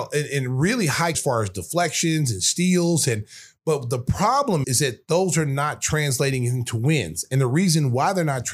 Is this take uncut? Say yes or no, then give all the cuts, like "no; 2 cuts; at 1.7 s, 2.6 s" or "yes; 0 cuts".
no; 2 cuts; at 1.1 s, 4.6 s